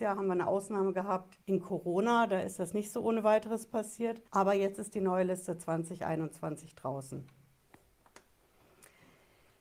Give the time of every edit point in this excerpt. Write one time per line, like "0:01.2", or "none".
0:01.4
0:04.3